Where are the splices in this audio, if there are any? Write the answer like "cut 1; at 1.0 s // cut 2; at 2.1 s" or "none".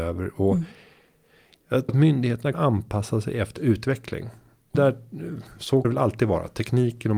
cut 1; at 1.9 s // cut 2; at 2.5 s // cut 3; at 3.6 s // cut 4; at 4.7 s // cut 5; at 5.8 s